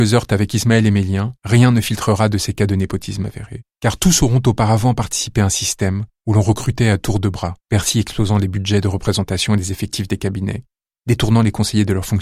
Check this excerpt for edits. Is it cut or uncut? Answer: cut